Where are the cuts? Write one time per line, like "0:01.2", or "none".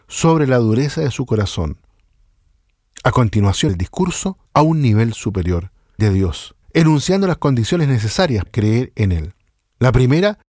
0:03.7
0:04.5
0:06.0
0:06.6
0:08.5
0:09.5